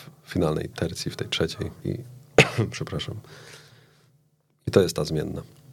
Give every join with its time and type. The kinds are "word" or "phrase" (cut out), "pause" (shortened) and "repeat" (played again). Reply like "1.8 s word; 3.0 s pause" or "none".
1.8 s word